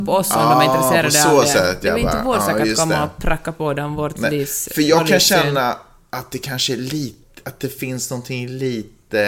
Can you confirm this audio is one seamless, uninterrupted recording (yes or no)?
yes